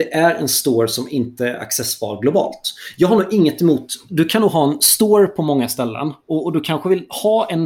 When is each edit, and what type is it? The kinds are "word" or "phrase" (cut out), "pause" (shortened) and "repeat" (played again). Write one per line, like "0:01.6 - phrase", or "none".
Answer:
none